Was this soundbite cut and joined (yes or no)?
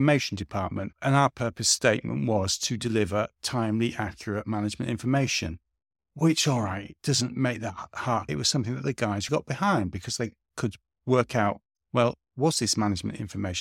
yes